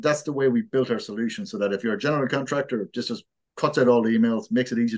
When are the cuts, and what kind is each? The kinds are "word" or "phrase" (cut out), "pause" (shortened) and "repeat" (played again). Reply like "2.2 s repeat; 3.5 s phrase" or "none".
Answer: none